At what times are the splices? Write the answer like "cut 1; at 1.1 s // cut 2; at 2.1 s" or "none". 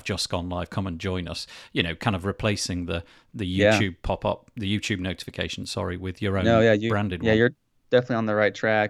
none